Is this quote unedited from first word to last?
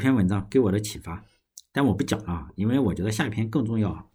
yes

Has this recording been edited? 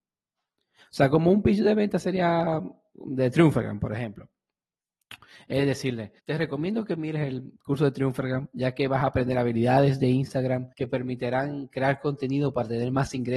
yes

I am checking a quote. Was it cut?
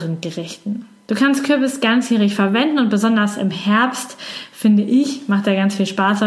no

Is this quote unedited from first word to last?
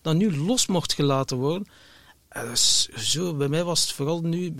yes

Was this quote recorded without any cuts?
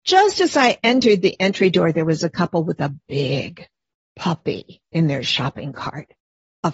yes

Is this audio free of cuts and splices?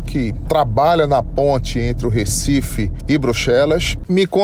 yes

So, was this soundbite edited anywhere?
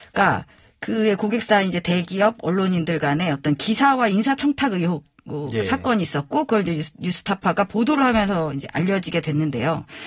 no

